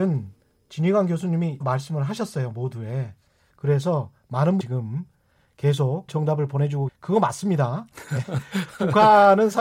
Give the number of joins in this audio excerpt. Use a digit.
4